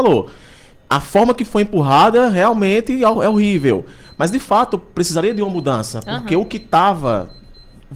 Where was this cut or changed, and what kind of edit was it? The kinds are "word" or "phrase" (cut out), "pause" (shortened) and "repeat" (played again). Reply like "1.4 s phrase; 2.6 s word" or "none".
none